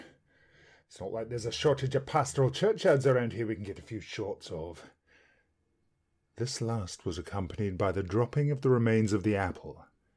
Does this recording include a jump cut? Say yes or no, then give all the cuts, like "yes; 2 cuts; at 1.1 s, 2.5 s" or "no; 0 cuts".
no; 0 cuts